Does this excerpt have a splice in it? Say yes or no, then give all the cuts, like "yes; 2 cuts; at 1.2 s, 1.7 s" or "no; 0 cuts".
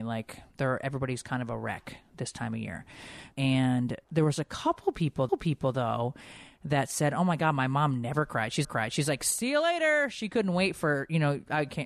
yes; 4 cuts; at 3.3 s, 4.0 s, 5.3 s, 8.6 s